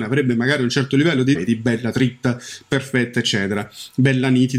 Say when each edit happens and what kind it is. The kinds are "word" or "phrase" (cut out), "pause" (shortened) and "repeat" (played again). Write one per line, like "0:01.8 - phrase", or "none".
0:01.3 - phrase